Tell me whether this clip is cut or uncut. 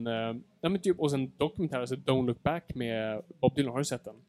uncut